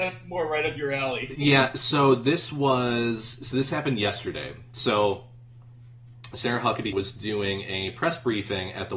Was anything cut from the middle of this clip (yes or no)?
yes